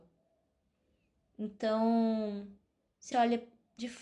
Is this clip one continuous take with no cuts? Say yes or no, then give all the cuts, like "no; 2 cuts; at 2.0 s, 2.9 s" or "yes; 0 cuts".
no; 1 cut; at 3.1 s